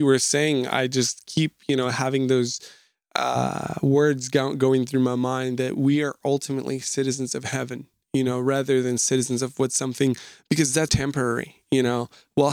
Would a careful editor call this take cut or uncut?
cut